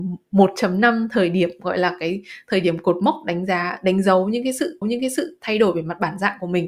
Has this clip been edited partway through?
yes; 1 cut; at 4.8 s

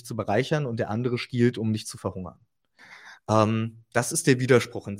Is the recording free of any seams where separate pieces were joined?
yes; 0 cuts

